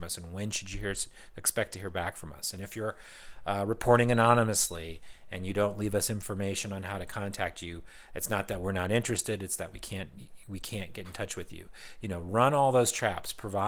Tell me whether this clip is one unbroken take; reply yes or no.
yes